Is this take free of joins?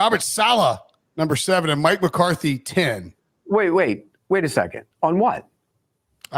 no; 1 cut; at 4.9 s

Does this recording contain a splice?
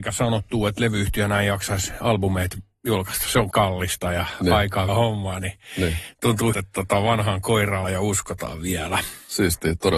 yes; 4 cuts; at 3.5 s, 4.9 s, 6.5 s, 7.8 s

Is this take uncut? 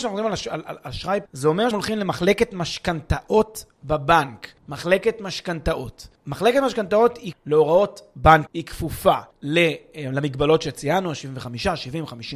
no; 7 cuts; at 1.3 s, 1.7 s, 4.6 s, 6.2 s, 7.3 s, 8.5 s, 9.3 s

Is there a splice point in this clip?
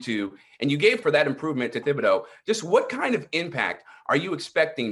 yes; 2 cuts; at 1.0 s, 1.8 s

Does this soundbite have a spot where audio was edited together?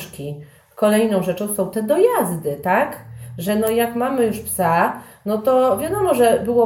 no; 0 cuts

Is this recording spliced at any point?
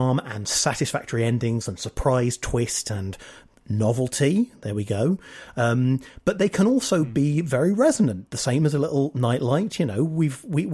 no; 0 cuts

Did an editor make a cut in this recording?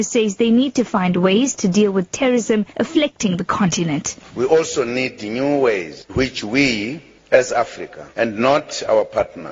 yes; 3 cuts; at 2.7 s, 6.1 s, 8.1 s

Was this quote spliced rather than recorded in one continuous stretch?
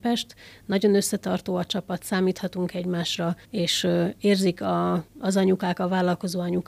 yes; 2 cuts; at 3.4 s, 5.1 s

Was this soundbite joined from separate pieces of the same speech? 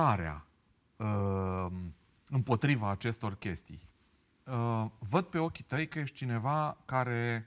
no; 0 cuts

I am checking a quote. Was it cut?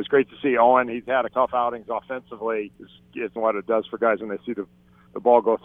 yes; 3 cuts; at 1.3 s, 2.7 s, 3.4 s

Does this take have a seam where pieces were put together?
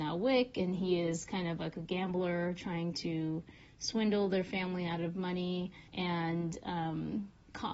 yes; 1 cut; at 5.9 s

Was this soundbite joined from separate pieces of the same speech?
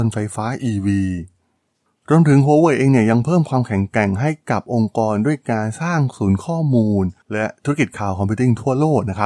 no; 0 cuts

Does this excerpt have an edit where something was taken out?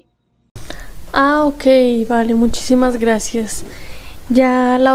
no; 0 cuts

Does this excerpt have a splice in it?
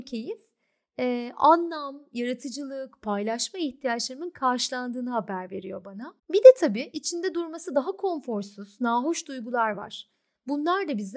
yes; 1 cut; at 6.2 s

